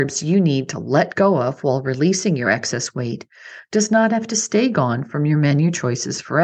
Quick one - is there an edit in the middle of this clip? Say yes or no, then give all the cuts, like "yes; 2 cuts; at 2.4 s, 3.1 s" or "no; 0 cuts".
no; 0 cuts